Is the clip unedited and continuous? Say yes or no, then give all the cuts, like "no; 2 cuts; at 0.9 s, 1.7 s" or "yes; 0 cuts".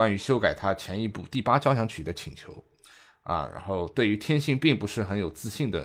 yes; 0 cuts